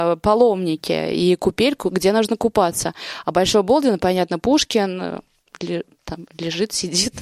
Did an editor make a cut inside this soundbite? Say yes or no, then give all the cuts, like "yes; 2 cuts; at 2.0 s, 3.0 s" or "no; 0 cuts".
no; 0 cuts